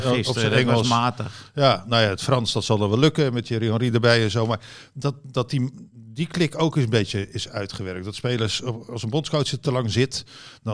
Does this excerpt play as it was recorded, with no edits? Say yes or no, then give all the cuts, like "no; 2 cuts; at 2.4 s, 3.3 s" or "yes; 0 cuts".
yes; 0 cuts